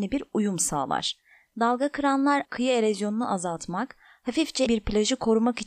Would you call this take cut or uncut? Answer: cut